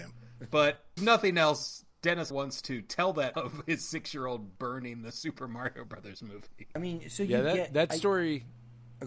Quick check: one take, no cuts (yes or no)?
no